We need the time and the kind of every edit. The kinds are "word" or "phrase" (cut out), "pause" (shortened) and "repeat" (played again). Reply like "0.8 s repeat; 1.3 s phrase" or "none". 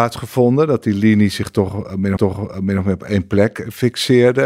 2.2 s repeat